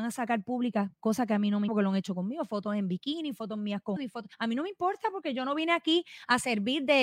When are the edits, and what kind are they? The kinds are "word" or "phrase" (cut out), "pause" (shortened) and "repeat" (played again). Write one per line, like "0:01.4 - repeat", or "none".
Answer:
0:01.7 - word
0:04.0 - word
0:04.3 - pause